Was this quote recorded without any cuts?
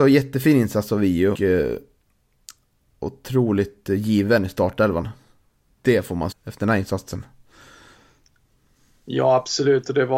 no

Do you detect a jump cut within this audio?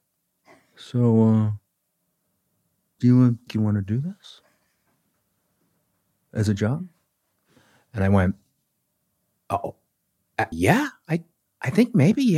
yes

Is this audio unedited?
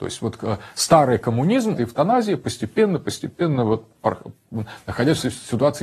no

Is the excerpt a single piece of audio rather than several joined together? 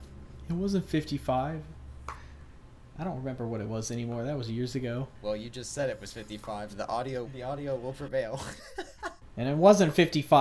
no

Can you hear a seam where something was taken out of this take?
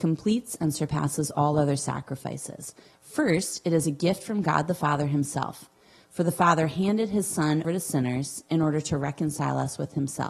yes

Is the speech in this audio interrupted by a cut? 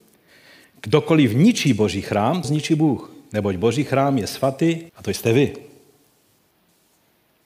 yes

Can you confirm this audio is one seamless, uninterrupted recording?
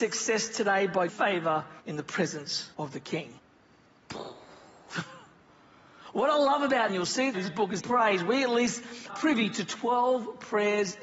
no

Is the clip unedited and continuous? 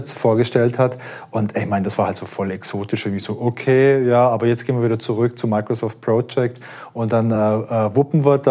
yes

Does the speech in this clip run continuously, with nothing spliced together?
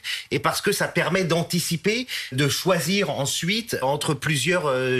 no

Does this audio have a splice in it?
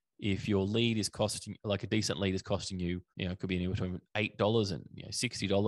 yes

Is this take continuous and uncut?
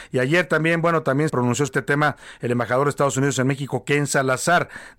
no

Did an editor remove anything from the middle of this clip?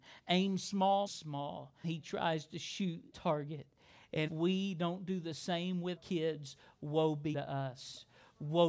yes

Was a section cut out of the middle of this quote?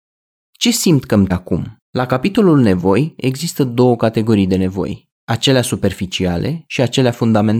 yes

